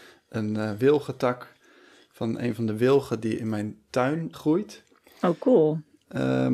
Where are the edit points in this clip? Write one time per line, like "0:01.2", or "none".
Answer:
0:04.3